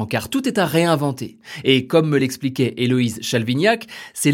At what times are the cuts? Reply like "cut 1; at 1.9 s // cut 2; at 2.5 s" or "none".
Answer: none